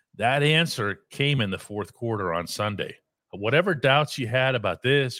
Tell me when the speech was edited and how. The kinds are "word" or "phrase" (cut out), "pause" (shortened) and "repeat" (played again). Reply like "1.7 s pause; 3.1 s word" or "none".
none